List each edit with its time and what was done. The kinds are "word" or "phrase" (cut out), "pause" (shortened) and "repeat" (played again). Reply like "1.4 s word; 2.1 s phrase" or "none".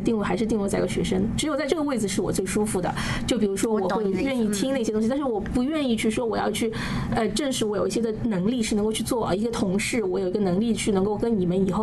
none